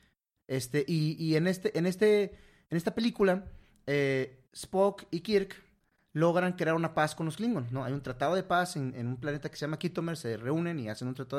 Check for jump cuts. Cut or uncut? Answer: uncut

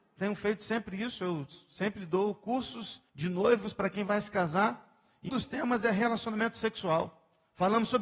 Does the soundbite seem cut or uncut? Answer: cut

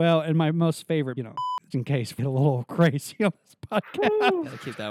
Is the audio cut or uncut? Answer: cut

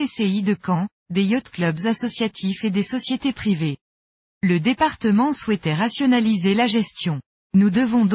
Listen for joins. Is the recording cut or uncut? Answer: uncut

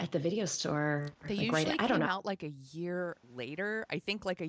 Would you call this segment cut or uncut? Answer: cut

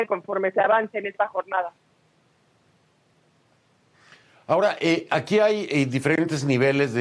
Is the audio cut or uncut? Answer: uncut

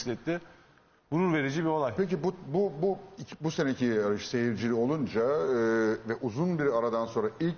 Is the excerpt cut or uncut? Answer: uncut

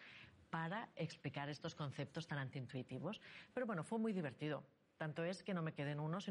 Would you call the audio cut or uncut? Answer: uncut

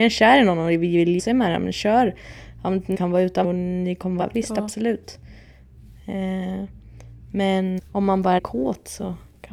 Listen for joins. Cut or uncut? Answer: cut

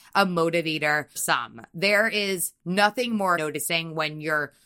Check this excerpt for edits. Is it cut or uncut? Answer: cut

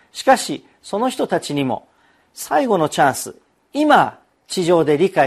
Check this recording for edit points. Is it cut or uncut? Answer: uncut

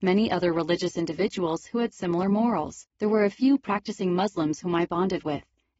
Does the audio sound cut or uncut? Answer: cut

